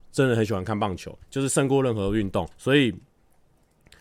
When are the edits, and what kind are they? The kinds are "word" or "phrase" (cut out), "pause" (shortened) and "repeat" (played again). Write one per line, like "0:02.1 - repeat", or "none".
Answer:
0:01.2 - pause
0:02.5 - pause